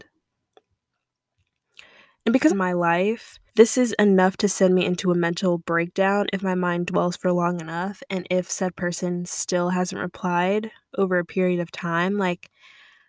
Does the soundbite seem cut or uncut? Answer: cut